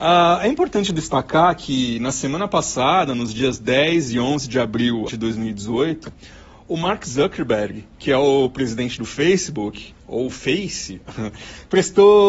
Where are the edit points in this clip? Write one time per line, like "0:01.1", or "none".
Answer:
0:05.1